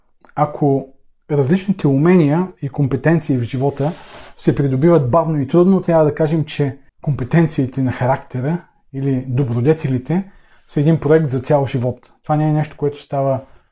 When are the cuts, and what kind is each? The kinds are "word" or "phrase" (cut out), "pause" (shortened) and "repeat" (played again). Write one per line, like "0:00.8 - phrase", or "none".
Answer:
0:06.9 - pause